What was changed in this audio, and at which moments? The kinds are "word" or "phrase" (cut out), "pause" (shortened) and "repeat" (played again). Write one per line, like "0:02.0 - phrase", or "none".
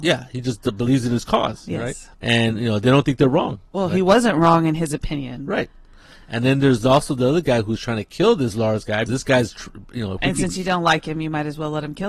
0:02.1 - pause
0:03.7 - pause
0:09.1 - phrase